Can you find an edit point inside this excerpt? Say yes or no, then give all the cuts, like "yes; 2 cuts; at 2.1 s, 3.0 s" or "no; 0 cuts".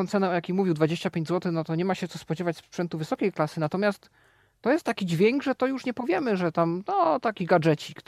no; 0 cuts